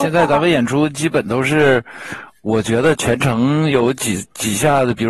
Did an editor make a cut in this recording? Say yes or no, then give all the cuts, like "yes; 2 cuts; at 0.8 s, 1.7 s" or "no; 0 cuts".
no; 0 cuts